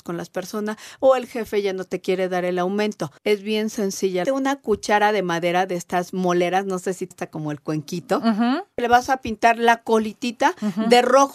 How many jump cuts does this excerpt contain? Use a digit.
3